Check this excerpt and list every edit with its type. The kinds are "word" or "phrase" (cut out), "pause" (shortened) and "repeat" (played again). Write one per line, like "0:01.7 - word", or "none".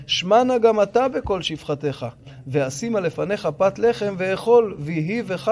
none